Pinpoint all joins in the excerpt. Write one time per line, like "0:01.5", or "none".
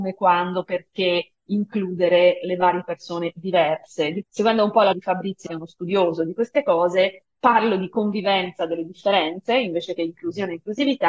0:04.2
0:04.9
0:05.5